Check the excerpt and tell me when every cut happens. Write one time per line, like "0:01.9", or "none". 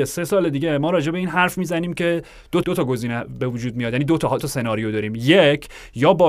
0:02.6
0:04.4